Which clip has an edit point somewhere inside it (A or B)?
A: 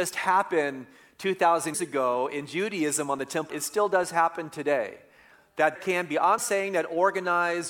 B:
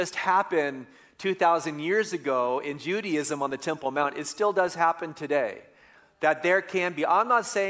A